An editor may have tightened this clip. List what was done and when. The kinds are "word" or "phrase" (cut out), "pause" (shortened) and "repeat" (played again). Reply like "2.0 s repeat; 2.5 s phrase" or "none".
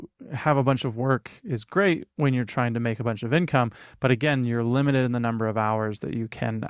none